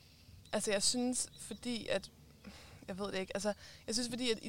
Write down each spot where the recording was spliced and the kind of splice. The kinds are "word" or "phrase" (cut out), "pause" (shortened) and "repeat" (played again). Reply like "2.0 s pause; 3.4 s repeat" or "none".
none

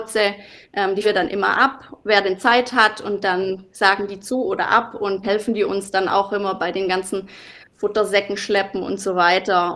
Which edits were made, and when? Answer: 1.0 s word; 5.2 s word

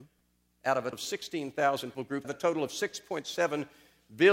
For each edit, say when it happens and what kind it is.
0.9 s word; 1.9 s word; 2.2 s word

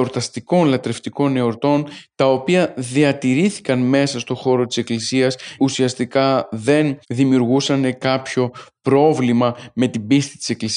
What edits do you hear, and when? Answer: 5.6 s word; 7.0 s pause

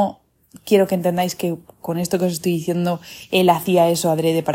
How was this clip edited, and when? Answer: none

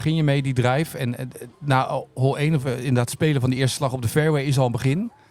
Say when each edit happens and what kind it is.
none

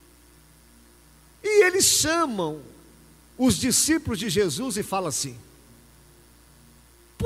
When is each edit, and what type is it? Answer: none

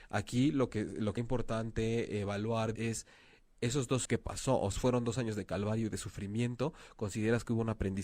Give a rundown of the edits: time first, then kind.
1.2 s word; 2.8 s word; 4.1 s word; 4.7 s word

